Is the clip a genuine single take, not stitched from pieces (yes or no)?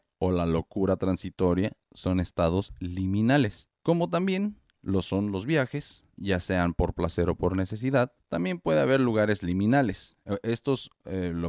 no